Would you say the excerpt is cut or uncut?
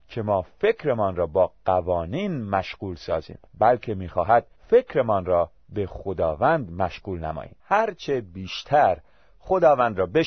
cut